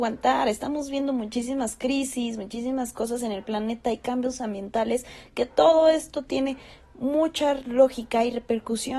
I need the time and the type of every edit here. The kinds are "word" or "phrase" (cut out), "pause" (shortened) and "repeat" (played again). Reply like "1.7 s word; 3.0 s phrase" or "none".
none